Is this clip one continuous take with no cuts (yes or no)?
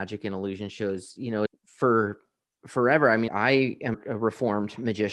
no